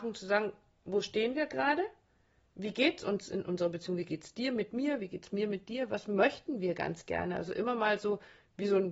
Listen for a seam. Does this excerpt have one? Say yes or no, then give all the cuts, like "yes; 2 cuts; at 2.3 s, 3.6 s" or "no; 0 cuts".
no; 0 cuts